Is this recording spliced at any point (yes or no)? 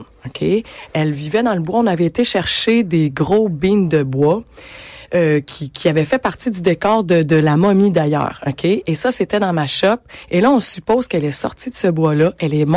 no